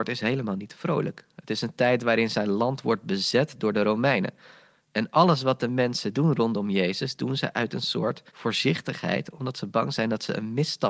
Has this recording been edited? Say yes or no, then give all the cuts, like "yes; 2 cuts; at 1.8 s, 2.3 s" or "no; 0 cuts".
yes; 1 cut; at 8.3 s